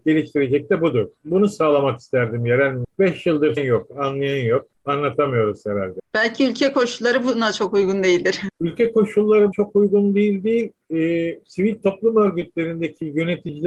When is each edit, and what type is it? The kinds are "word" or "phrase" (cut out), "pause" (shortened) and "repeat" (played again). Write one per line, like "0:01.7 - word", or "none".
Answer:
0:03.6 - phrase
0:09.5 - word